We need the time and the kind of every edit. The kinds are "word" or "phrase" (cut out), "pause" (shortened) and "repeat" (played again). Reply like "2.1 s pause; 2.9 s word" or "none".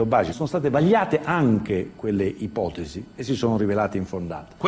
none